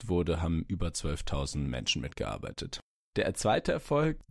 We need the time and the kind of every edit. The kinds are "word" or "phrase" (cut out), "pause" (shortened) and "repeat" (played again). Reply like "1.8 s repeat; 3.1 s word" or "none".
none